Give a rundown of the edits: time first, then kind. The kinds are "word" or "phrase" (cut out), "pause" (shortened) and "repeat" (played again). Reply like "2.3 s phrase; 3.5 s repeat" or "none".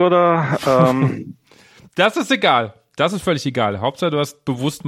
none